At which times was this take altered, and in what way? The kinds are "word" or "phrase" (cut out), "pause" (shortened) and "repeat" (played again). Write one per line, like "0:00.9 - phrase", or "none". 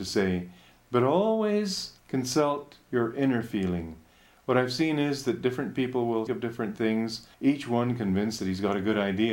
0:02.0 - pause
0:06.3 - word
0:07.3 - pause